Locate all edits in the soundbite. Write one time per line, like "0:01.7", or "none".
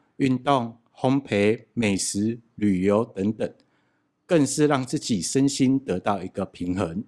none